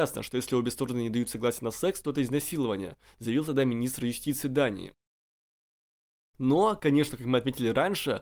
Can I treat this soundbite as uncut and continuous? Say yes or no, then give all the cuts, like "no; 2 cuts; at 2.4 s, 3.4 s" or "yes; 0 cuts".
yes; 0 cuts